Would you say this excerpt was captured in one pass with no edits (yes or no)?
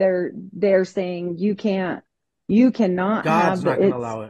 yes